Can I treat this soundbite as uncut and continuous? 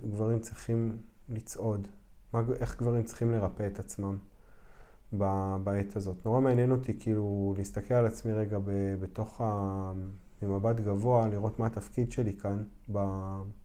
yes; 0 cuts

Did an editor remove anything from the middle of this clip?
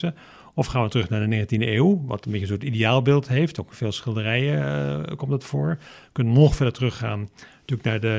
no; 0 cuts

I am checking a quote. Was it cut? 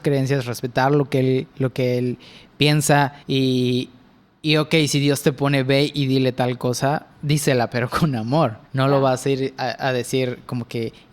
yes; 2 cuts; at 3.2 s, 8.7 s

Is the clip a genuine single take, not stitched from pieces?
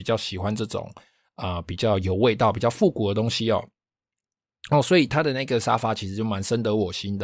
yes; 0 cuts

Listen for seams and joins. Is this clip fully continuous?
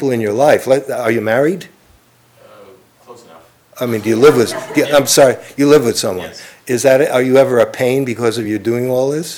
yes; 0 cuts

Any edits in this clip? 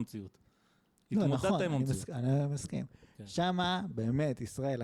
no; 0 cuts

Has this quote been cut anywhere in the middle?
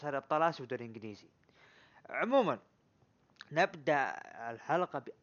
no; 0 cuts

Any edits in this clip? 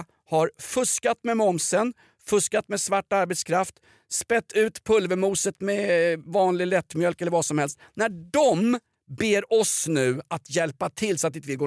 no; 0 cuts

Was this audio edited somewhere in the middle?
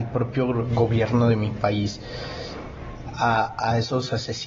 no; 0 cuts

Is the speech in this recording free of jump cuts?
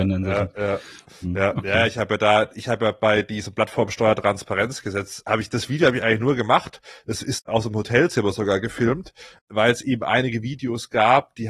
yes; 0 cuts

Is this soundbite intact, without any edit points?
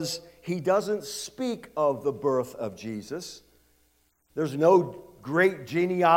yes; 0 cuts

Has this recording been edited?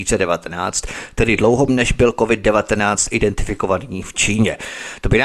yes; 1 cut; at 1.7 s

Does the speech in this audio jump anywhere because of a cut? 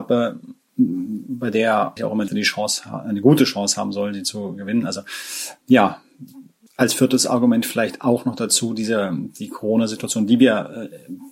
yes; 3 cuts; at 2.0 s, 2.3 s, 6.7 s

